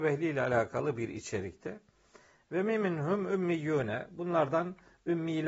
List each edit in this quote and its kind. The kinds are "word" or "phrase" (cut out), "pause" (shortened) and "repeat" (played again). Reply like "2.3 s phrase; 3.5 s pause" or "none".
none